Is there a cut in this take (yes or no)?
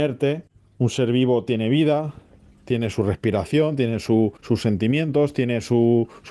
yes